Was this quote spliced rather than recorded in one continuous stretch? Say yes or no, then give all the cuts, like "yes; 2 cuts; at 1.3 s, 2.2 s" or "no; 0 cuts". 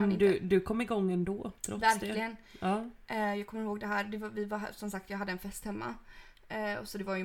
yes; 1 cut; at 1.6 s